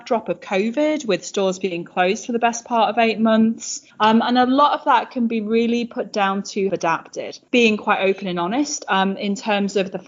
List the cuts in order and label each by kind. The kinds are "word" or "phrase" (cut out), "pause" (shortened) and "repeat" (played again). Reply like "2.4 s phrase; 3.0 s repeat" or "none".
3.9 s pause; 6.7 s phrase